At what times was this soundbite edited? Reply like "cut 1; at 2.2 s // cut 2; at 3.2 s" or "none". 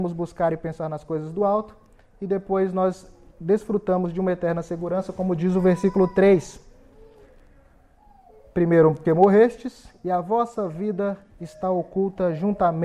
cut 1; at 9.1 s